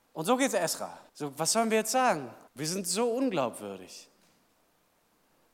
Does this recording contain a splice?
yes; 2 cuts; at 1.1 s, 2.5 s

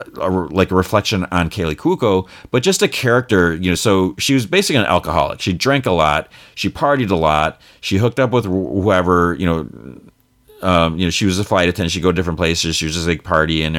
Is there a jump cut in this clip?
no; 0 cuts

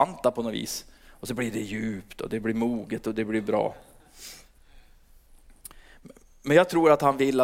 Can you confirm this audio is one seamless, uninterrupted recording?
yes; 0 cuts

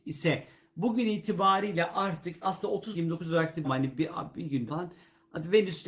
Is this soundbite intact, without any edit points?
no; 4 cuts; at 2.4 s, 2.9 s, 3.6 s, 4.7 s

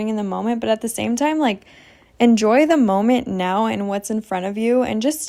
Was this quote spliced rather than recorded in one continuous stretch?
no; 0 cuts

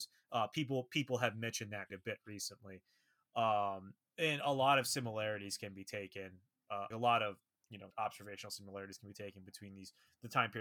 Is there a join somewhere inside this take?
yes; 3 cuts; at 1.9 s, 6.9 s, 7.9 s

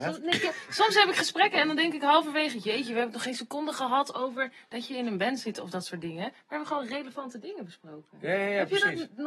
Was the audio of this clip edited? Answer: no; 0 cuts

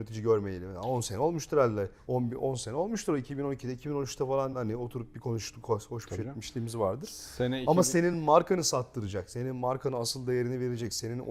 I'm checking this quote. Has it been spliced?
no; 0 cuts

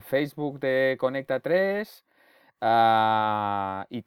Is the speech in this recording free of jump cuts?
yes; 0 cuts

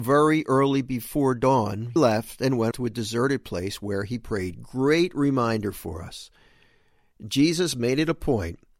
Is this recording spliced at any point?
yes; 2 cuts; at 2.0 s, 2.7 s

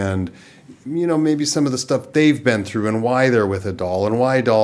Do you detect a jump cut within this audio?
no; 0 cuts

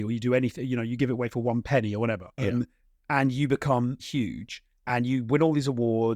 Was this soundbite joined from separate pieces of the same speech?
yes; 2 cuts; at 2.3 s, 4.0 s

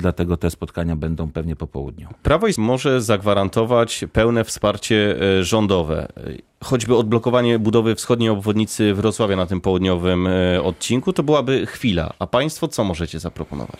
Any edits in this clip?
yes; 1 cut; at 2.6 s

